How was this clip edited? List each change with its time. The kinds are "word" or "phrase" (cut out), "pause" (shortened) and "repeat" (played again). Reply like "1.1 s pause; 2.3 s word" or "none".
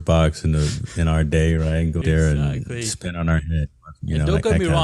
2.0 s word